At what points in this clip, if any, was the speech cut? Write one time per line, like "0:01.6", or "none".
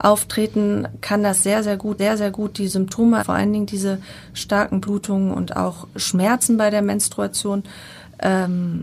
0:02.0
0:03.2

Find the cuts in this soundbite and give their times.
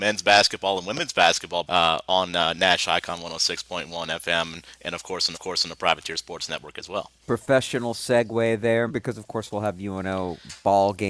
0:01.6
0:05.3
0:07.2
0:08.9

